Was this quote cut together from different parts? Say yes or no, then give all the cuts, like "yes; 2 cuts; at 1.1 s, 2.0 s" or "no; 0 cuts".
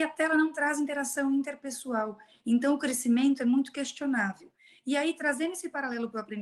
no; 0 cuts